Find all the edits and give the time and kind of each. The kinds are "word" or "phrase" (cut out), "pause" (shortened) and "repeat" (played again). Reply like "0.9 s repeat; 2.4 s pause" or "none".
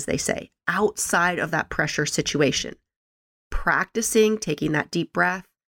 none